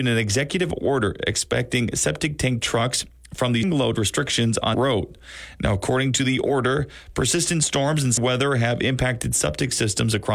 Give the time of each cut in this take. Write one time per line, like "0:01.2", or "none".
0:03.6
0:04.7
0:08.2